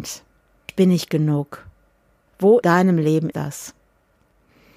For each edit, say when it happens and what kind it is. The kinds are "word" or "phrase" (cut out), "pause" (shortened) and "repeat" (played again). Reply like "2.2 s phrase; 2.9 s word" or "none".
1.1 s word; 2.6 s word; 3.3 s word